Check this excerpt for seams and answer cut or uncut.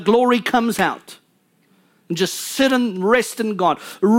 uncut